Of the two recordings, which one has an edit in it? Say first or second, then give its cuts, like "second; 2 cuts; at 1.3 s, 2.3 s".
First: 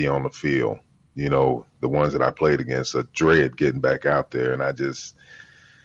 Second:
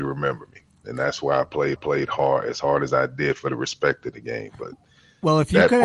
second; 1 cut; at 1.8 s